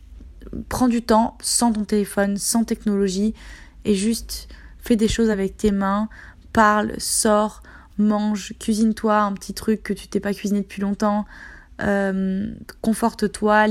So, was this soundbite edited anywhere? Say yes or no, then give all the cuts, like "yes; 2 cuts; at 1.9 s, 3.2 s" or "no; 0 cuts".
no; 0 cuts